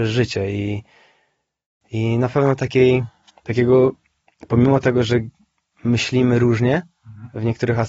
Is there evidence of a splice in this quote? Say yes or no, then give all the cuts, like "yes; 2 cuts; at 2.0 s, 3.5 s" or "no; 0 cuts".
no; 0 cuts